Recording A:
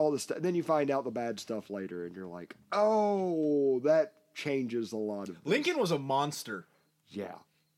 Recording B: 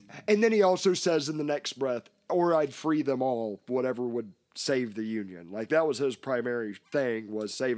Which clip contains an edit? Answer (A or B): B